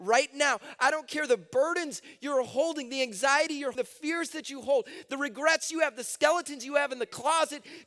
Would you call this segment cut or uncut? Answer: cut